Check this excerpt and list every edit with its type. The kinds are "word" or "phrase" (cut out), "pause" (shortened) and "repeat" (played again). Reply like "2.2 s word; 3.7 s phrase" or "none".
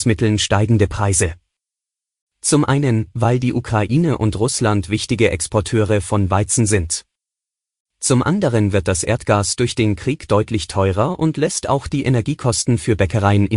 none